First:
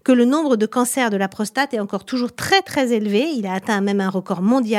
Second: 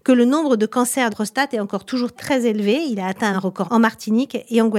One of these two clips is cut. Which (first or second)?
second